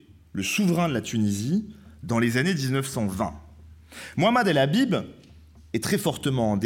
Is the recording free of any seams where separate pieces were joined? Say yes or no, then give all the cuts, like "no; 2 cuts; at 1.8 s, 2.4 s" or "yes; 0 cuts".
yes; 0 cuts